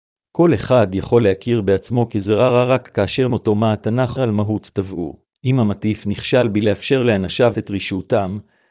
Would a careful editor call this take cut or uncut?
cut